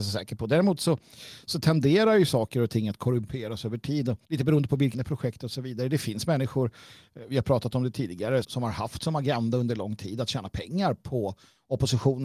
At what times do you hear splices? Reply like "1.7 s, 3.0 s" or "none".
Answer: 4.2 s, 4.9 s, 8.4 s